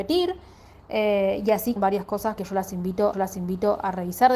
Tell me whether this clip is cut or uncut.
cut